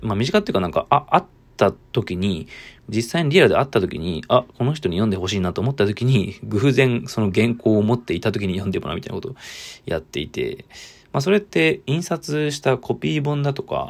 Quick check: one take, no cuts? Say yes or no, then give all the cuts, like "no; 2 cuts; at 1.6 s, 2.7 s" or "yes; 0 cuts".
no; 2 cuts; at 1.8 s, 2.8 s